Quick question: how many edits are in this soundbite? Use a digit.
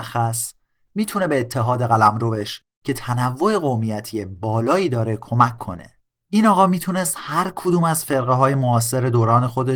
0